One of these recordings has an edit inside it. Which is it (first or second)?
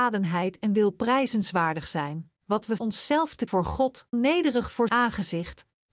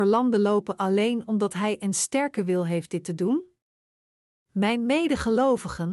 first